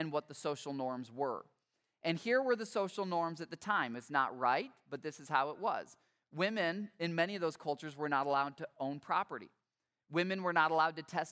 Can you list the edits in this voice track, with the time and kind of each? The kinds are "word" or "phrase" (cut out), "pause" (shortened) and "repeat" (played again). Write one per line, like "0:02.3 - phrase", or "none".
none